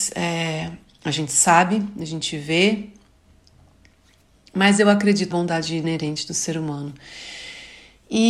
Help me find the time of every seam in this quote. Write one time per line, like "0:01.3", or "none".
0:05.3

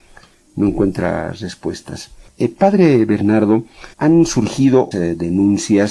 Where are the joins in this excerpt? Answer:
0:02.3
0:03.9
0:04.9

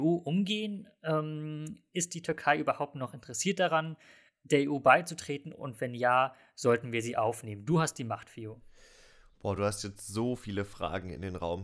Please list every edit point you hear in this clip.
none

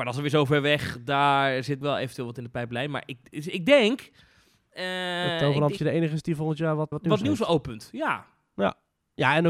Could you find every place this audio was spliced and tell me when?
0:01.8
0:05.8
0:06.9

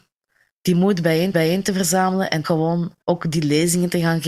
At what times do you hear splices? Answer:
0:01.3
0:02.4
0:03.0

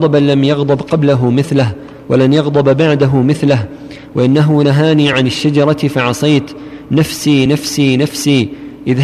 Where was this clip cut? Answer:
none

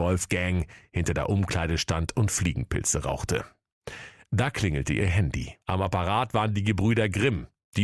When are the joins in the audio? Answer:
0:05.6

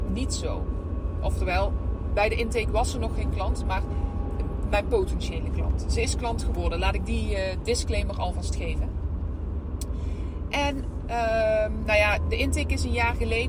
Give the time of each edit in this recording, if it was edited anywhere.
none

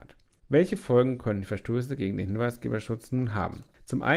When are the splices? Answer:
none

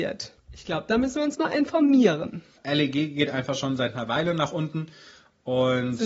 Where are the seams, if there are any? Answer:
none

